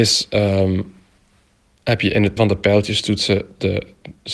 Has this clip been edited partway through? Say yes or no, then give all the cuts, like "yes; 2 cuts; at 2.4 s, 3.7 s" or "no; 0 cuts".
yes; 1 cut; at 2.4 s